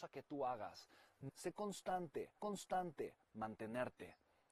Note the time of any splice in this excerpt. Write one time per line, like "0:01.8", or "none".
0:01.3
0:02.4